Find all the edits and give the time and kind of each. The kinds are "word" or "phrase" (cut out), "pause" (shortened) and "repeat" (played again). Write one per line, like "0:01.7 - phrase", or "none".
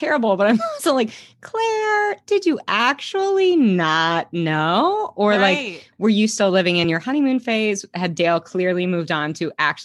none